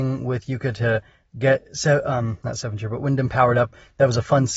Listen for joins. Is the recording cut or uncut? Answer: uncut